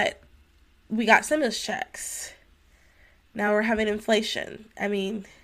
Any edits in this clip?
no; 0 cuts

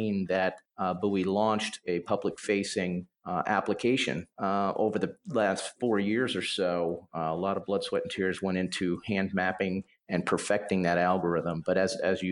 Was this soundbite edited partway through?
no; 0 cuts

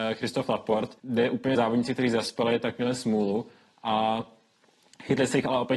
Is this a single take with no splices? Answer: no; 2 cuts; at 1.0 s, 1.5 s

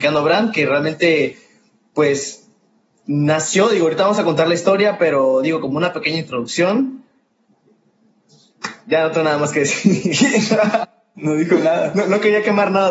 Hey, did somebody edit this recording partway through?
no; 0 cuts

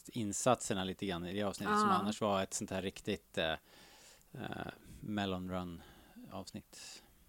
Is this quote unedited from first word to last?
yes; 0 cuts

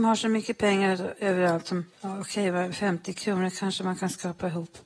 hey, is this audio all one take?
no; 1 cut; at 1.9 s

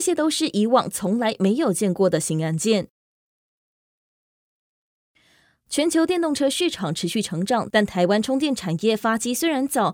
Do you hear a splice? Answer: no; 0 cuts

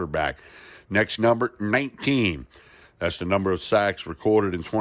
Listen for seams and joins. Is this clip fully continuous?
no; 1 cut; at 1.2 s

